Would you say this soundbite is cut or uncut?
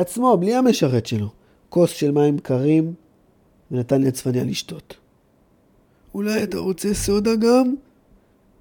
uncut